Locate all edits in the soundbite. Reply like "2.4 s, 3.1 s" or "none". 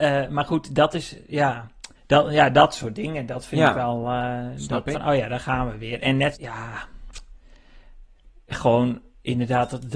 1.9 s, 4.9 s, 6.3 s